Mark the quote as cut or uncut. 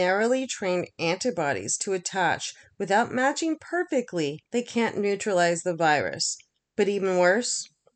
cut